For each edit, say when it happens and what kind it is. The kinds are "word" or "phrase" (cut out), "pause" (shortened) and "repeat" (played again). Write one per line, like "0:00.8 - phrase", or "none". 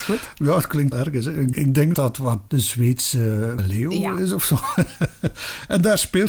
0:00.9 - word
0:01.5 - word
0:01.9 - word
0:02.5 - word
0:03.6 - word